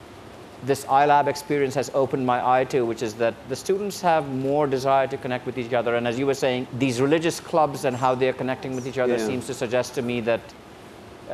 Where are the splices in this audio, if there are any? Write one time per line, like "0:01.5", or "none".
0:03.4
0:06.7